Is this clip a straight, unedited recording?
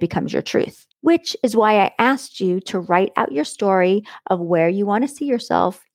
no; 1 cut; at 0.9 s

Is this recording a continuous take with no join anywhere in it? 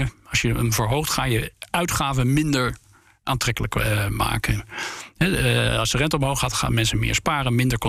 yes; 0 cuts

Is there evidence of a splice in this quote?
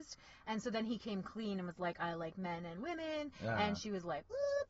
no; 0 cuts

